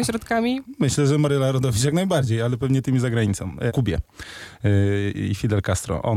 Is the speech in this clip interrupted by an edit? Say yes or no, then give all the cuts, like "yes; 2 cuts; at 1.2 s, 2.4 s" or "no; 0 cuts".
yes; 1 cut; at 3.7 s